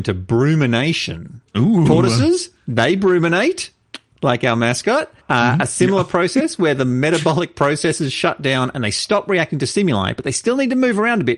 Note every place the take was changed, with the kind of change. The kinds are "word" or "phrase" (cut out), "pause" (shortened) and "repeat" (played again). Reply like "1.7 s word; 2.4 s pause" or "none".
5.2 s pause